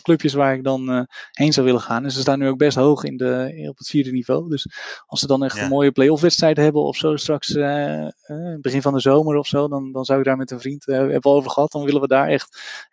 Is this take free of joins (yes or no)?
yes